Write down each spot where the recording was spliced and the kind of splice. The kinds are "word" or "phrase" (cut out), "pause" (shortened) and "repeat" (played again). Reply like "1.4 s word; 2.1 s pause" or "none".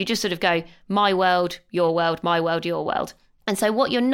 none